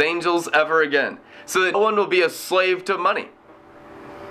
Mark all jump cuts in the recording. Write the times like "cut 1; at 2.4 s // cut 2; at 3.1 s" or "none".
cut 1; at 1.7 s